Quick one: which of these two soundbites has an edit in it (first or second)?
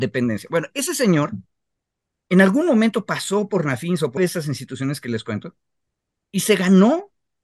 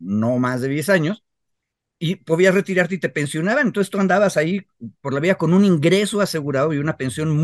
first